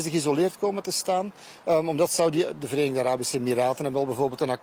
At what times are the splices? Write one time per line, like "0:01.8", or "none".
none